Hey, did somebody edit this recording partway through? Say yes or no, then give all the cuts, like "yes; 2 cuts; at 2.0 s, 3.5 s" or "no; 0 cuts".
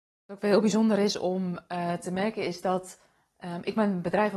no; 0 cuts